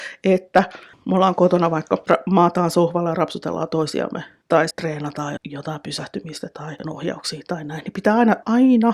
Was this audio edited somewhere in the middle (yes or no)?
yes